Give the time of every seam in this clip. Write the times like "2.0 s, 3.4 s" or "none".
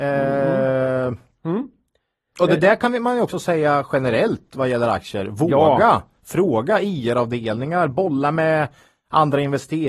none